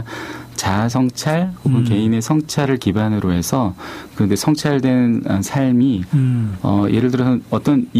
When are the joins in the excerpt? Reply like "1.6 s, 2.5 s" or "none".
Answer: none